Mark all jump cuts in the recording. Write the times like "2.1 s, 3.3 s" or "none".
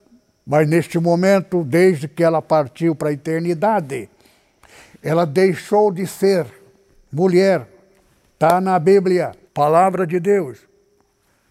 9.5 s